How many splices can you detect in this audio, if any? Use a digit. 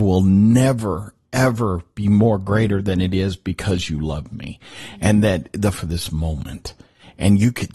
1